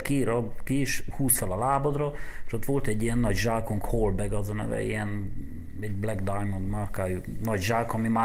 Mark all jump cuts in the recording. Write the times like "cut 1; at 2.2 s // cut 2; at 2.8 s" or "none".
none